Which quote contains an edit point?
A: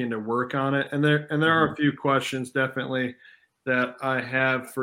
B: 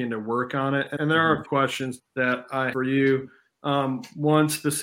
B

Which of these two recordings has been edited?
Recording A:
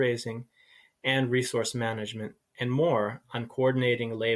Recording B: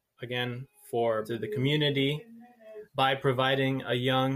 B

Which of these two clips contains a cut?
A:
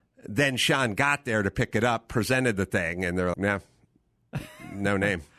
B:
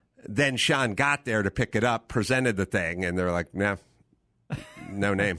A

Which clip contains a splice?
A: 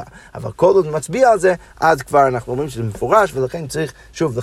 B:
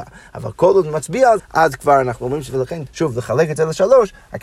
B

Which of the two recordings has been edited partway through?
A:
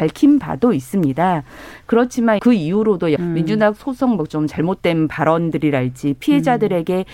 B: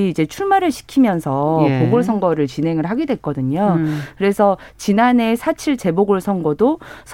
A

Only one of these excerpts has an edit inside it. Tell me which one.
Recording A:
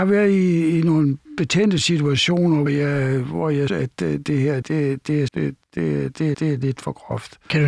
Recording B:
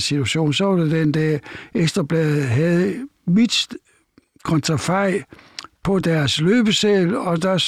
A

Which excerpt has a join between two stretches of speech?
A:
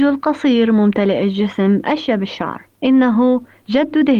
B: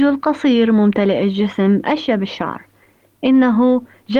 A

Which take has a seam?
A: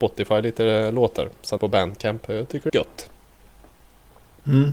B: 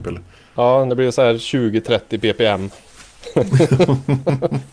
A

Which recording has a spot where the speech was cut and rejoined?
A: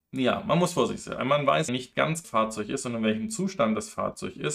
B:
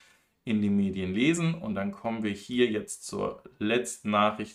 A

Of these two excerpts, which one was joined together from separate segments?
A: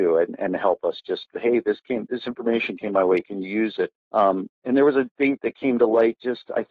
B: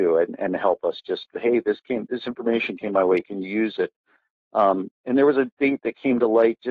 A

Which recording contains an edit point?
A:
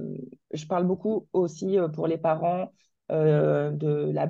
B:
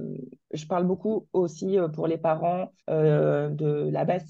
B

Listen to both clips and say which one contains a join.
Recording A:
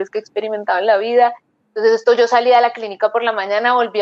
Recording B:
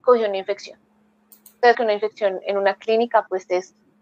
B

